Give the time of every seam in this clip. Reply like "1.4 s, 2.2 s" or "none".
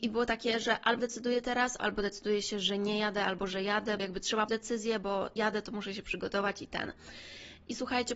1.0 s, 1.8 s, 4.0 s, 4.5 s, 5.4 s